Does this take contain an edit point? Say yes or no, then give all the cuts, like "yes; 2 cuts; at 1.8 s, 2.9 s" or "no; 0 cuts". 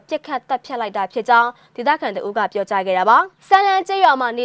yes; 1 cut; at 3.4 s